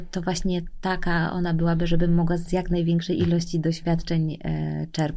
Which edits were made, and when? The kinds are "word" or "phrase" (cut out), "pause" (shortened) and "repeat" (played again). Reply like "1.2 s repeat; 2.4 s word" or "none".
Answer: none